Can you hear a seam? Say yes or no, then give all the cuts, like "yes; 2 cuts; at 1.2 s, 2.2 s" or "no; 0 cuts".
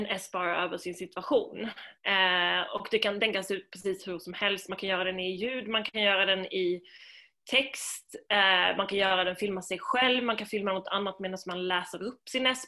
no; 0 cuts